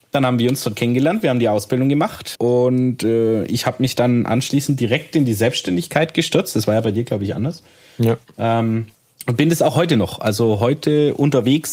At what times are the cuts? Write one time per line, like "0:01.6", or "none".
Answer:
0:02.3
0:08.9